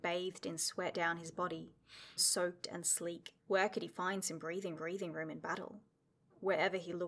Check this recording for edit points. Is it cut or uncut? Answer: cut